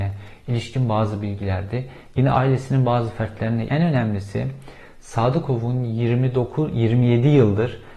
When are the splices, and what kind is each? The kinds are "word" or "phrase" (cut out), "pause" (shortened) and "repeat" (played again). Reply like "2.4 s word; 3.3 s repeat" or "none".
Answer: 3.7 s phrase